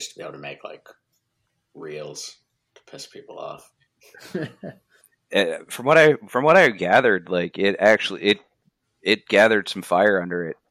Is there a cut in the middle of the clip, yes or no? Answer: no